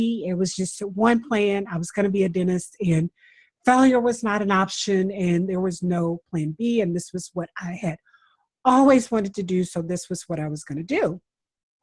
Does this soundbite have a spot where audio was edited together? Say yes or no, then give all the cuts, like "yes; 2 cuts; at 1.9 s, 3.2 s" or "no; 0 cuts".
no; 0 cuts